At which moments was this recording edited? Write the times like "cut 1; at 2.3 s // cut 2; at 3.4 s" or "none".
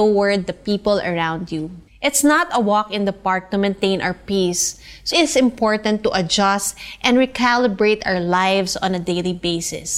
cut 1; at 1.9 s // cut 2; at 5.1 s